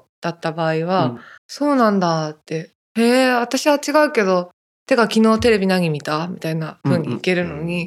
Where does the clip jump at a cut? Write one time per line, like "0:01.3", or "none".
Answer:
0:01.4
0:02.8

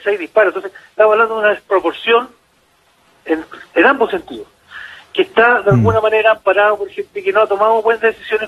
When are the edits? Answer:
none

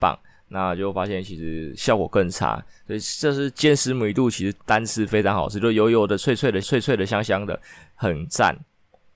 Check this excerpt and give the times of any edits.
0:06.6

